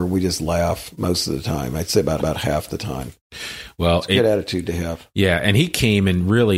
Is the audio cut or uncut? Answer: cut